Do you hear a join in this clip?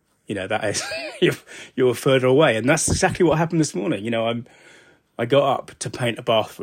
no; 0 cuts

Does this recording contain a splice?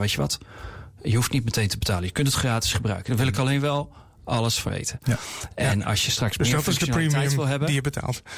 yes; 2 cuts; at 2.3 s, 4.7 s

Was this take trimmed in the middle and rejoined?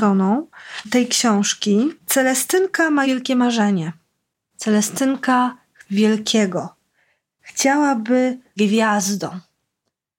yes; 4 cuts; at 2.0 s, 3.0 s, 5.8 s, 8.6 s

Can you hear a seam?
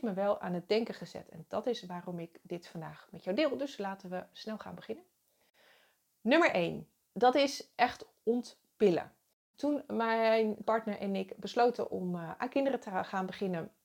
yes; 2 cuts; at 4.3 s, 10.6 s

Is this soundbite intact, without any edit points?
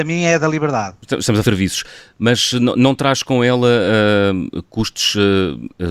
no; 1 cut; at 1.4 s

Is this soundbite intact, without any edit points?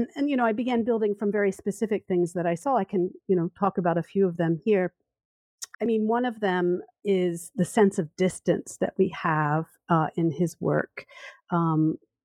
no; 2 cuts; at 5.7 s, 6.9 s

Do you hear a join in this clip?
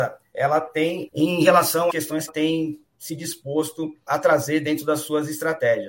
yes; 4 cuts; at 1.1 s, 1.9 s, 2.3 s, 4.1 s

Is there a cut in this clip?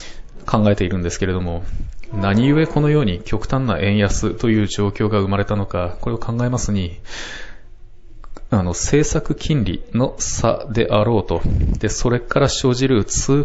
no; 0 cuts

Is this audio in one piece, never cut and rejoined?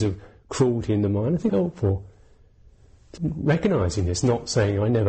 no; 2 cuts; at 1.5 s, 3.2 s

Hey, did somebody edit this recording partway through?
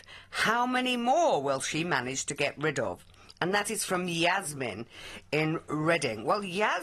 no; 0 cuts

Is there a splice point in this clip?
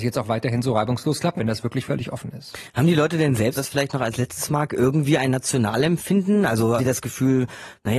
yes; 3 cuts; at 1.4 s, 3.6 s, 6.8 s

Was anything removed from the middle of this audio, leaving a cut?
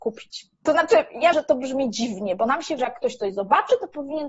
yes; 2 cuts; at 1.3 s, 2.8 s

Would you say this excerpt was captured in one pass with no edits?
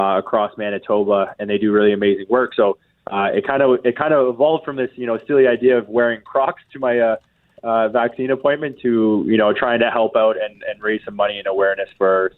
yes; 0 cuts

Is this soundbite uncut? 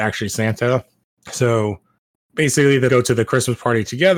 no; 2 cuts; at 2.1 s, 2.9 s

